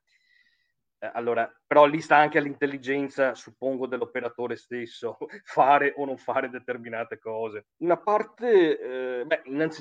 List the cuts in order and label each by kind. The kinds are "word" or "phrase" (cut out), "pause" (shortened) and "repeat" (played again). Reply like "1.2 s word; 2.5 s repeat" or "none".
7.7 s pause